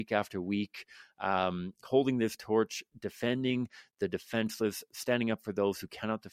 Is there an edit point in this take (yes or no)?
no